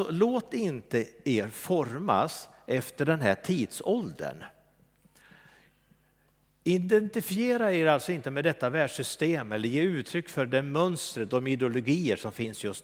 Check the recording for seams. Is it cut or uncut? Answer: uncut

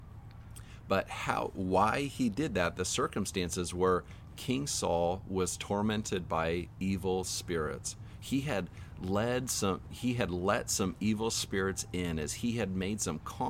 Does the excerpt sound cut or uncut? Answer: uncut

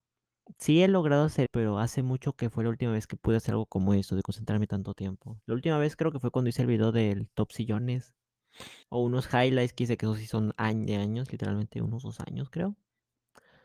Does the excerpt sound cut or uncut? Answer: cut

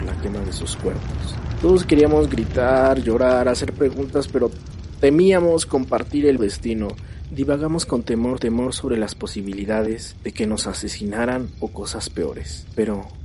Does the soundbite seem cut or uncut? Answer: cut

